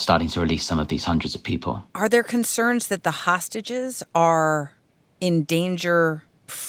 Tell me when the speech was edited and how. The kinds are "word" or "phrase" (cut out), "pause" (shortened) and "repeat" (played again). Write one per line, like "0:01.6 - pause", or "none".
0:01.9 - pause